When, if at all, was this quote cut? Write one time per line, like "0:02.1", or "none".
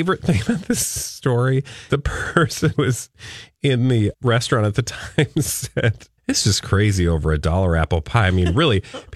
0:01.9
0:02.7
0:04.1
0:06.2